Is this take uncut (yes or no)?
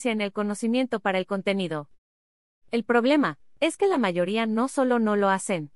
yes